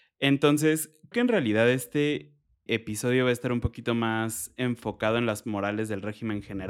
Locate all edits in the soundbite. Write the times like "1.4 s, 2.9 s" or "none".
1.1 s, 2.7 s, 5.4 s